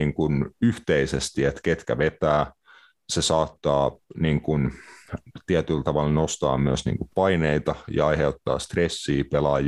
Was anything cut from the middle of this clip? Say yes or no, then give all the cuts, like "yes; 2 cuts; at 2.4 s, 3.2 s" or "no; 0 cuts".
no; 0 cuts